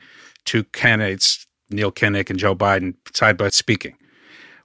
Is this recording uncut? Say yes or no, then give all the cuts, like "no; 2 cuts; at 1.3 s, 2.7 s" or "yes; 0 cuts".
no; 1 cut; at 3.5 s